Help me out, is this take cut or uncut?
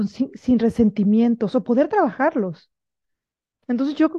uncut